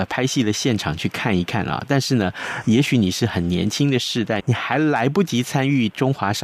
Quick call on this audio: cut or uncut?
cut